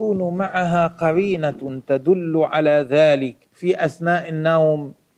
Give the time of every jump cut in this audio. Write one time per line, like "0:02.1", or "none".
0:03.4